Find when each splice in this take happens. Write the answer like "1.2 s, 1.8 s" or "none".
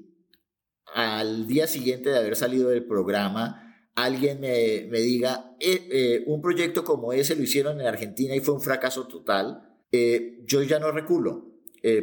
9.8 s